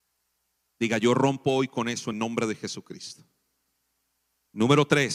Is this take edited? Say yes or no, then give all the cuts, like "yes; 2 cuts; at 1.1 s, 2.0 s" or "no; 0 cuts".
yes; 1 cut; at 2.1 s